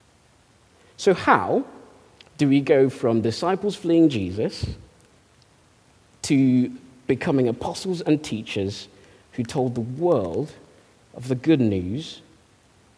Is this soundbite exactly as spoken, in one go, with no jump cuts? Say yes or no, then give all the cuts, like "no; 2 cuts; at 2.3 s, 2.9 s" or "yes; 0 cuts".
yes; 0 cuts